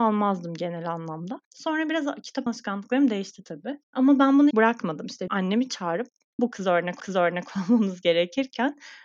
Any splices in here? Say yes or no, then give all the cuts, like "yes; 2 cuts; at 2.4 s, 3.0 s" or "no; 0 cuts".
yes; 7 cuts; at 1.4 s, 2.5 s, 3.8 s, 4.5 s, 5.3 s, 6.4 s, 7.0 s